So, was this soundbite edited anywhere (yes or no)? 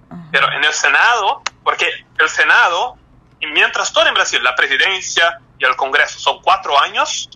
no